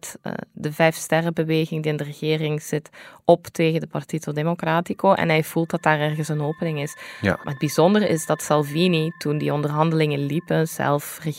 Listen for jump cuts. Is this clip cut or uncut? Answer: uncut